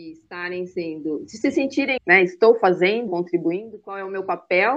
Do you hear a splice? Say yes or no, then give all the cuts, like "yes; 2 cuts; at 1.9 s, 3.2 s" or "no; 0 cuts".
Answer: yes; 2 cuts; at 2.0 s, 3.1 s